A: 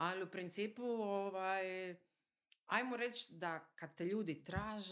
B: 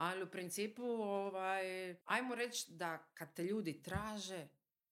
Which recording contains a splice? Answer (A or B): B